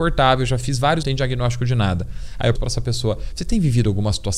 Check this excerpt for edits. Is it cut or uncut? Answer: cut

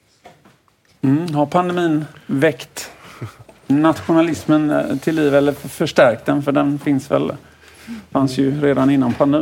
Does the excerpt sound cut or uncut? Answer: uncut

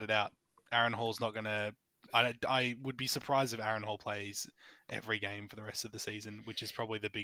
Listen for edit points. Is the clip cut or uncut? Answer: uncut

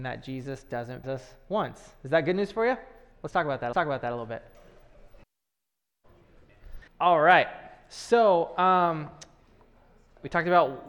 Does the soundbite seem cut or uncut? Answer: cut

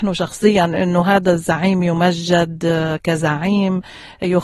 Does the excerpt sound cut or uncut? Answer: uncut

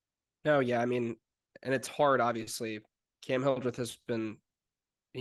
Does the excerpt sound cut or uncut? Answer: uncut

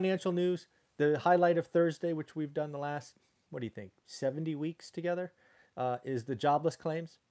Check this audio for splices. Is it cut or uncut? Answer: uncut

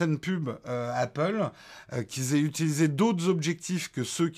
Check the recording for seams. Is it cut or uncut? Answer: uncut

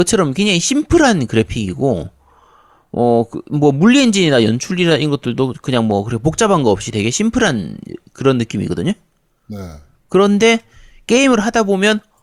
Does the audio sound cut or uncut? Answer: uncut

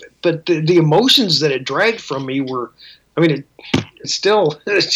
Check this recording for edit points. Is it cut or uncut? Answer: cut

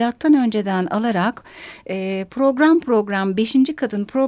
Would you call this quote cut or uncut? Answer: uncut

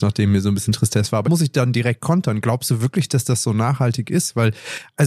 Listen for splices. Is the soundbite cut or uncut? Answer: cut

